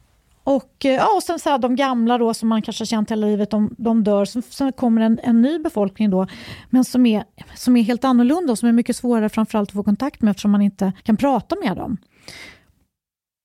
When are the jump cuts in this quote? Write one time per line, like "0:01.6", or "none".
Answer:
0:11.0